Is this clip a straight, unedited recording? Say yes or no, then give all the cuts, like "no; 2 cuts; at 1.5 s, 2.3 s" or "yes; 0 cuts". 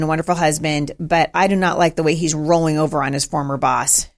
yes; 0 cuts